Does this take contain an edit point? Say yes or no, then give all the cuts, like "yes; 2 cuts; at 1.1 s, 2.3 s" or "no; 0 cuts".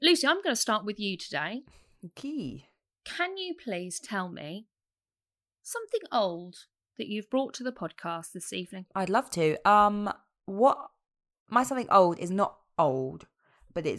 no; 0 cuts